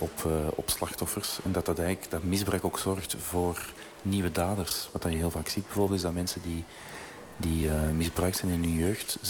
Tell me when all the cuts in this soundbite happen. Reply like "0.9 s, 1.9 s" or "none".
none